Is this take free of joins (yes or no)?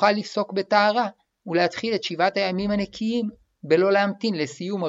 yes